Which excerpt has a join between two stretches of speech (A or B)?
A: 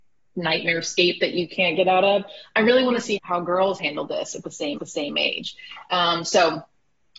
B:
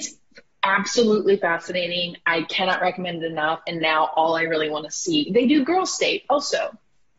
A